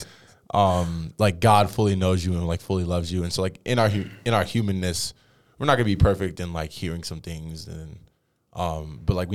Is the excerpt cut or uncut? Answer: uncut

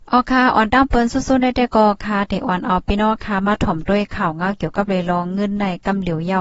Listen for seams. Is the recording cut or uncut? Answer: uncut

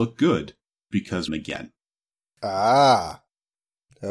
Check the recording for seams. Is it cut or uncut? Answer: cut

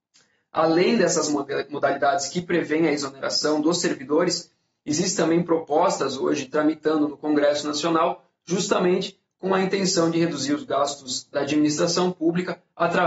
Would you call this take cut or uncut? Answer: uncut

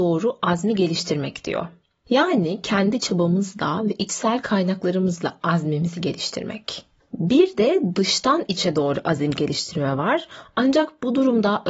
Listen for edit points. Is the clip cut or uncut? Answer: uncut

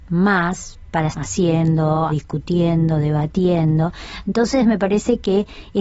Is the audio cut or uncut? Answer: cut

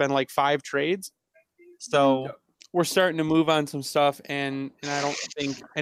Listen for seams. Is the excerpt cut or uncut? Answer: uncut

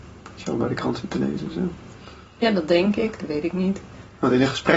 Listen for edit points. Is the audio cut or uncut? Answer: uncut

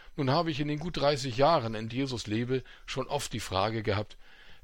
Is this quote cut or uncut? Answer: cut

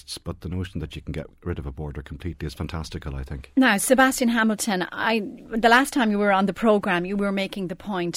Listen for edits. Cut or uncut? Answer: uncut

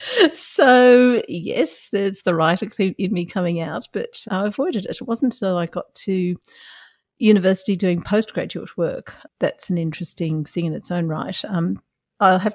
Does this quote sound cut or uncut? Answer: cut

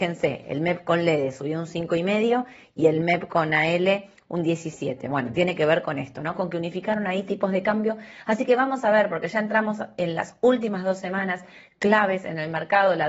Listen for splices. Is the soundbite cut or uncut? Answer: uncut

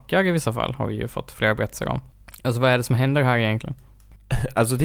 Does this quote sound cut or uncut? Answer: uncut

